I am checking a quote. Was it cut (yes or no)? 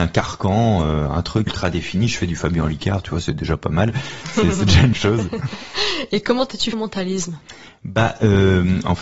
yes